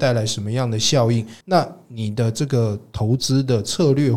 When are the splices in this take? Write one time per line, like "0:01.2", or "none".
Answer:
0:01.4